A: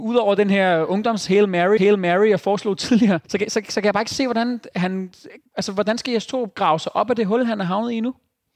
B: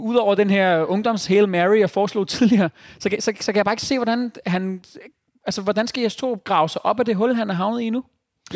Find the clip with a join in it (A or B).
A